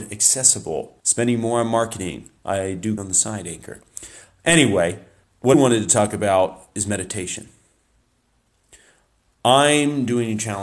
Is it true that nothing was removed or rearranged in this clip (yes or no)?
no